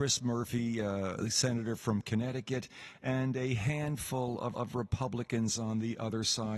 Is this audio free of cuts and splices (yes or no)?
no